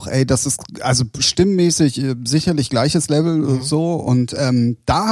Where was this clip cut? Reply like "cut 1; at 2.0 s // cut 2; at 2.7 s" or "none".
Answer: none